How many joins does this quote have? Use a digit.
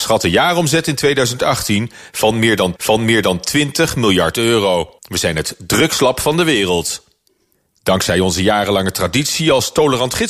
3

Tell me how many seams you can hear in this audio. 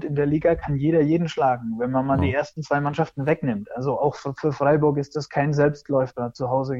0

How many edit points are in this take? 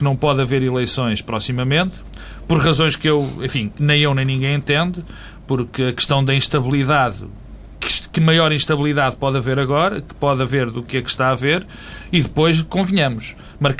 0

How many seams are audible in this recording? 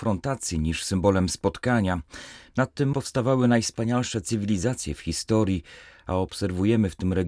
1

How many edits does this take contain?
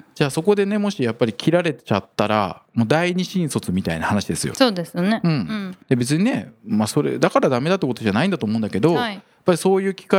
3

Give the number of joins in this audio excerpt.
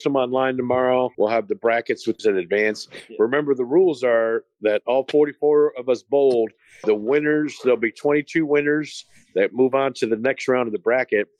2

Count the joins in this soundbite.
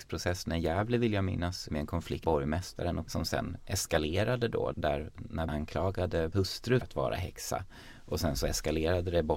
7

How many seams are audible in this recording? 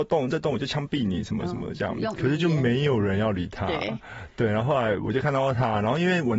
0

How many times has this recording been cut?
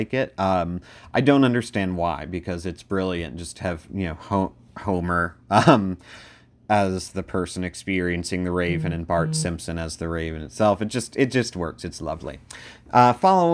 0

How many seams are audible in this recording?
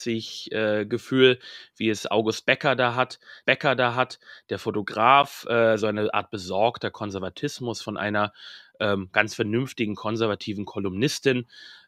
1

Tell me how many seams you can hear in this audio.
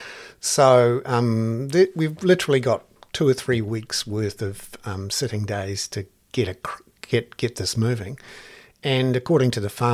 0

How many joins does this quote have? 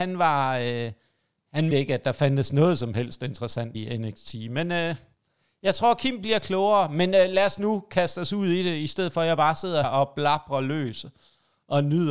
3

